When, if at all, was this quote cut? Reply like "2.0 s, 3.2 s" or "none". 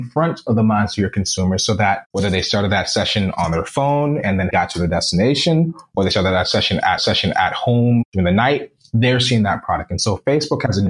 7.0 s